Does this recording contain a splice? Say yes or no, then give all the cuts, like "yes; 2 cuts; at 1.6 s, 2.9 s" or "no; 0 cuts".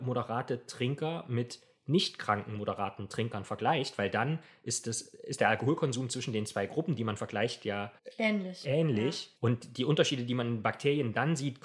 yes; 1 cut; at 9.4 s